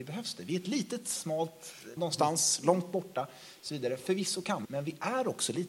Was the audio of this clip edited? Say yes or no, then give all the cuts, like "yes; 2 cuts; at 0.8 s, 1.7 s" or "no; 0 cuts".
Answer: yes; 2 cuts; at 2.0 s, 4.6 s